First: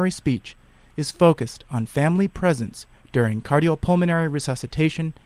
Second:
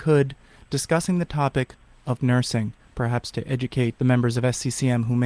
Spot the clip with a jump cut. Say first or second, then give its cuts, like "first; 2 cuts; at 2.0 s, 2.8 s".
second; 2 cuts; at 2.2 s, 4.0 s